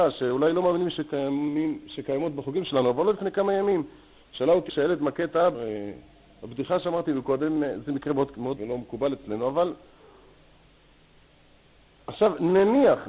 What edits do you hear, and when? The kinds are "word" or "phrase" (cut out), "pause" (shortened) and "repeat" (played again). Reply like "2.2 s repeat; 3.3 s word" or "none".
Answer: 4.7 s phrase; 5.5 s word; 8.6 s word